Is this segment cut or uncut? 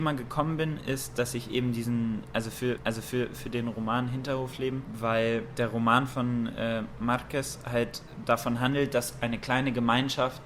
cut